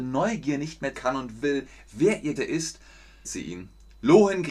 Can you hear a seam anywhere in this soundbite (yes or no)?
yes